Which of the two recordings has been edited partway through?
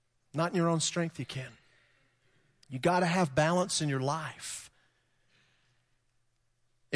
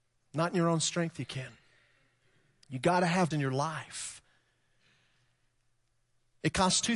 second; 1 cut; at 3.3 s

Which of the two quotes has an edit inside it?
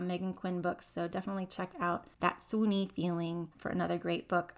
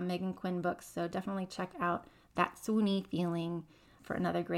first; 2 cuts; at 2.1 s, 3.5 s

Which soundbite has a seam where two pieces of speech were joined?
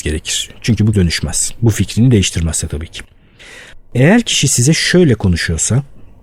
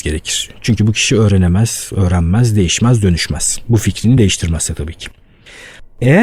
first; 1 cut; at 0.9 s

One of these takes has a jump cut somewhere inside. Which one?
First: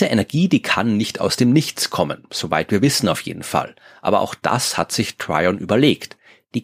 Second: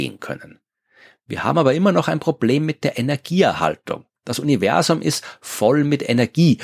second; 1 cut; at 4.2 s

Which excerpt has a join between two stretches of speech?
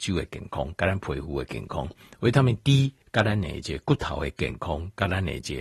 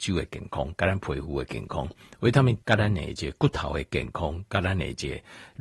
second; 1 cut; at 2.6 s

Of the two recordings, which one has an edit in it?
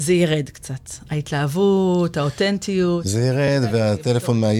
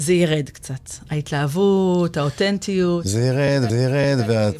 second; 1 cut; at 3.7 s

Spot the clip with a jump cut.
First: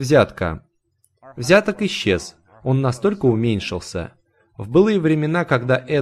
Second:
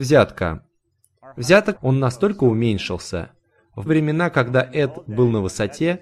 second; 2 cuts; at 1.8 s, 3.9 s

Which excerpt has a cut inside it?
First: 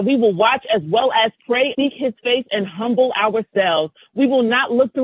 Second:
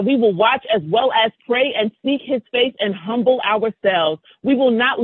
first; 1 cut; at 1.7 s

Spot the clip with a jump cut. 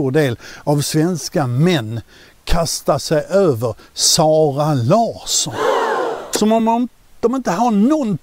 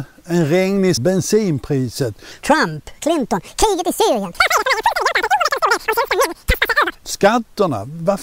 second; 3 cuts; at 1.0 s, 2.4 s, 3.0 s

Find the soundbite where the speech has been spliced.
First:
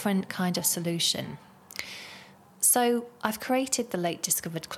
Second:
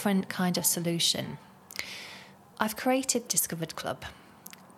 second; 2 cuts; at 2.5 s, 3.3 s

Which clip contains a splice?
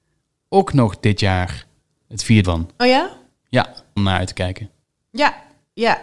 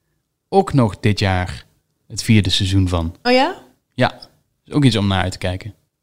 first; 2 cuts; at 2.4 s, 4.0 s

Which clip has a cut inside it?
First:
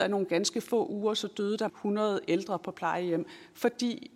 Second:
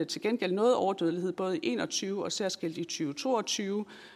first; 1 cut; at 1.7 s

